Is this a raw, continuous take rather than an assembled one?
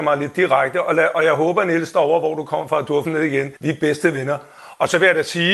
no; 2 cuts; at 3.1 s, 3.6 s

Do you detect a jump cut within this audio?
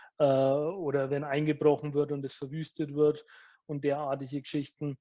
no; 0 cuts

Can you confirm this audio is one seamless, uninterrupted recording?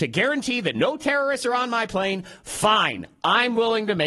yes; 0 cuts

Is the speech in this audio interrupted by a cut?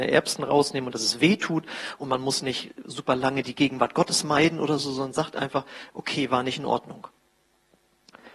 no; 0 cuts

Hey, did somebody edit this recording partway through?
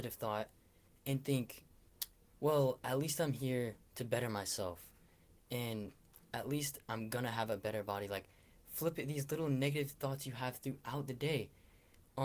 no; 0 cuts

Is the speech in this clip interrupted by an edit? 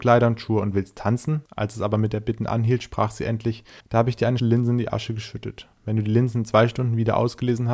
yes; 3 cuts; at 1.5 s, 3.8 s, 4.4 s

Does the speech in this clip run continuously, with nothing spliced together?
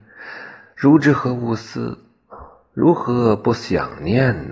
yes; 0 cuts

